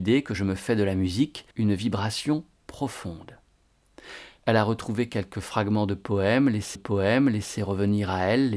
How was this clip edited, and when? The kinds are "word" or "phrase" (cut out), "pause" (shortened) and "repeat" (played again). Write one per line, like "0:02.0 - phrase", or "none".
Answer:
0:01.5 - pause
0:06.7 - repeat